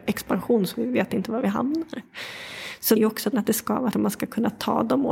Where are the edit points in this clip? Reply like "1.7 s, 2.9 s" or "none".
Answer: 3.0 s, 3.3 s, 3.9 s